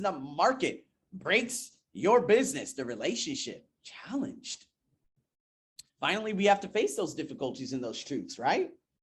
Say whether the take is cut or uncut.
cut